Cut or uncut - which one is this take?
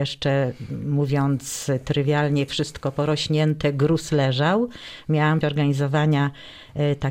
cut